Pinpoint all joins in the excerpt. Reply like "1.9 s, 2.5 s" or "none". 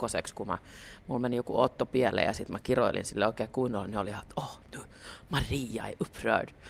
4.6 s